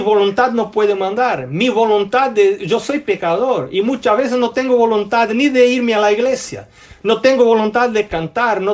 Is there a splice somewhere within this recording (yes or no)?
no